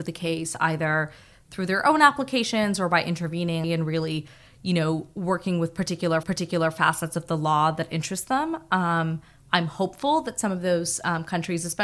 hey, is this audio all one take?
no; 2 cuts; at 3.6 s, 6.2 s

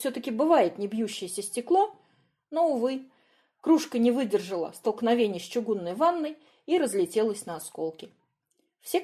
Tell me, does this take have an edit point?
no; 0 cuts

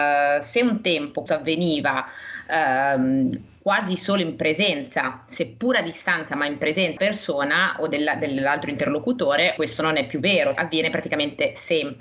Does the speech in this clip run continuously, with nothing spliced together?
no; 4 cuts; at 1.3 s, 7.0 s, 9.6 s, 10.5 s

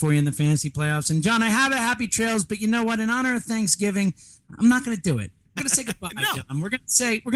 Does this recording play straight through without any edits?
no; 1 cut; at 5.6 s

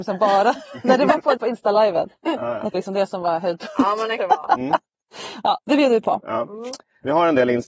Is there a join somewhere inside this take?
yes; 3 cuts; at 1.4 s, 2.7 s, 4.2 s

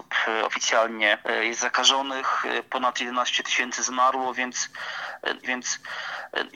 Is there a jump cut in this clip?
yes; 1 cut; at 5.4 s

